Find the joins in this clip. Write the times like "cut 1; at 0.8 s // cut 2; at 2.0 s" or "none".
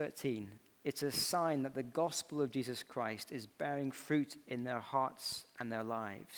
none